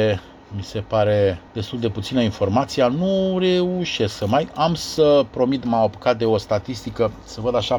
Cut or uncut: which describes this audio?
cut